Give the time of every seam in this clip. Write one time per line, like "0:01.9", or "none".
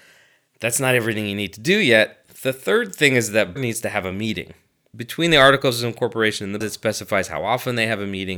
0:03.6
0:06.6